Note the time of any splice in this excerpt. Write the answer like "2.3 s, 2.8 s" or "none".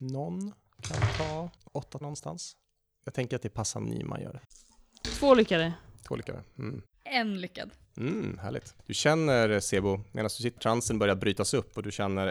1.7 s, 2.0 s, 3.8 s, 10.6 s